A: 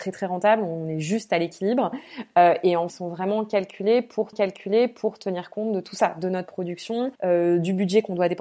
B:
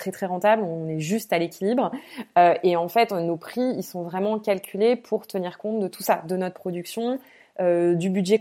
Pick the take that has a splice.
A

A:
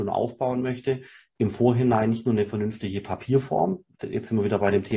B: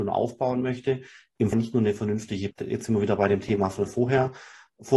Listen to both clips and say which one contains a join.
B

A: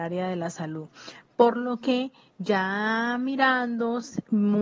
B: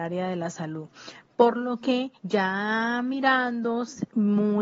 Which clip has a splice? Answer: B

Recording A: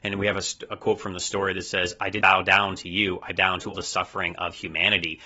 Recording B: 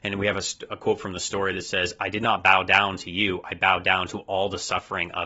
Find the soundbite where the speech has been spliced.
A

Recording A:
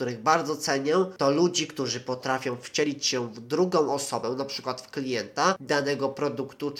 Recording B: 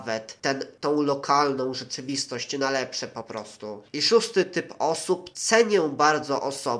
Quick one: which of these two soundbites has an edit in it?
B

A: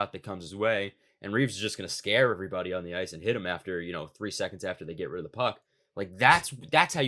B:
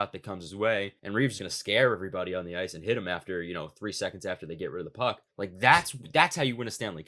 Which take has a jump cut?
B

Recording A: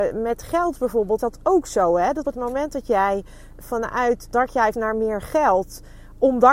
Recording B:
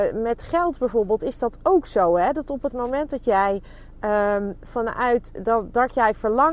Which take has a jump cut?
A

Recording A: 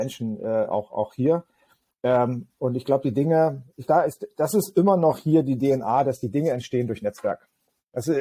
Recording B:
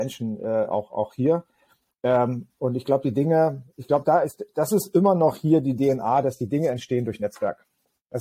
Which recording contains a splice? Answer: A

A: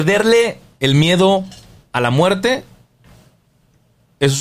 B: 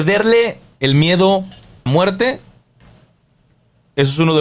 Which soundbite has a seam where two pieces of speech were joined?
B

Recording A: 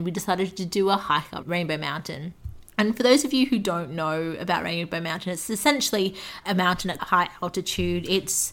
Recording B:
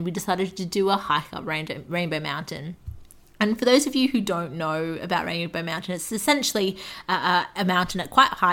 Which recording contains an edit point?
A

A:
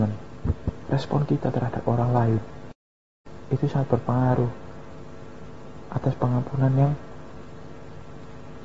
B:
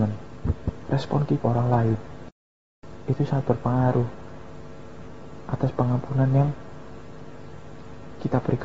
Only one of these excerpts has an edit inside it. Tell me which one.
B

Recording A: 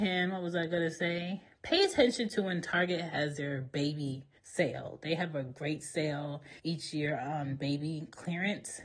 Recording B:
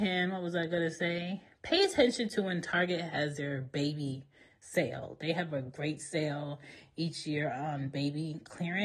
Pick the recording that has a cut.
A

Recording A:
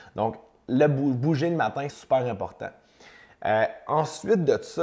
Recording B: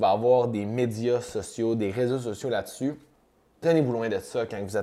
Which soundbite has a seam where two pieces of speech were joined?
A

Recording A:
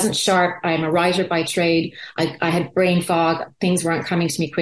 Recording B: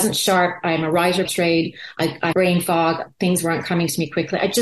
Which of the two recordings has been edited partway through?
B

